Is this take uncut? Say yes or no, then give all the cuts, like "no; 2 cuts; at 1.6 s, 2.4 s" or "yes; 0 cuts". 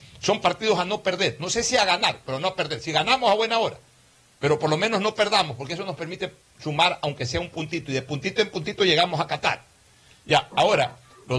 yes; 0 cuts